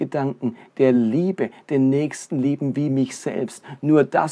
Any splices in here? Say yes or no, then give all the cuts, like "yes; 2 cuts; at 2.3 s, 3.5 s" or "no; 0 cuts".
no; 0 cuts